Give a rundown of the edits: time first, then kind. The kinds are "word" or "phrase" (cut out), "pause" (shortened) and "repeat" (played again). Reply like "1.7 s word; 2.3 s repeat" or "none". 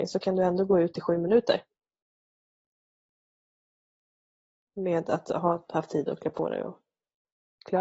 none